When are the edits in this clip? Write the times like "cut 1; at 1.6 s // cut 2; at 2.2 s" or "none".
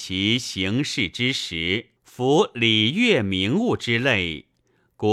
cut 1; at 2.0 s